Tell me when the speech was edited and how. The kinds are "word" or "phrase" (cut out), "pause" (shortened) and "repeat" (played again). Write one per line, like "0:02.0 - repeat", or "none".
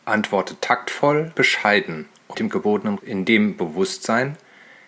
0:01.3 - word
0:02.3 - word
0:03.0 - word